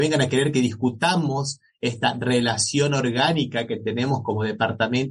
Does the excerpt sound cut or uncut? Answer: uncut